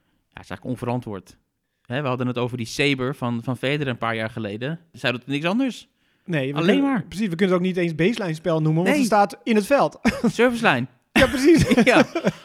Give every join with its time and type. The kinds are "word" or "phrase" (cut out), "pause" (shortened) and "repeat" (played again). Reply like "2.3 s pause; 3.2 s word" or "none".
none